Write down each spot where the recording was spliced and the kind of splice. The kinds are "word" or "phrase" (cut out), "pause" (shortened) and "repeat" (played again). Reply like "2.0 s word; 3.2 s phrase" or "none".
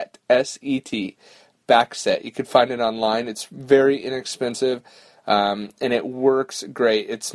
none